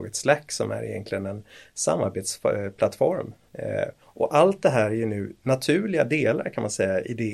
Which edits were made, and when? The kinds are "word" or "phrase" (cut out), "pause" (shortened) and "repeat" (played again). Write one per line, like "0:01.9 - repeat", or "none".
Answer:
0:04.0 - pause